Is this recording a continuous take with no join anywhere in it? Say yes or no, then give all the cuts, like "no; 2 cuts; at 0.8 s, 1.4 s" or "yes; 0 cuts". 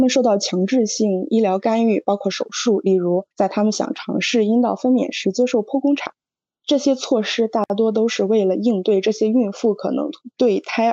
no; 1 cut; at 3.3 s